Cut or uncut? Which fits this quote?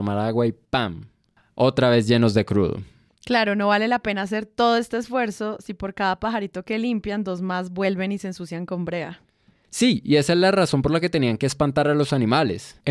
uncut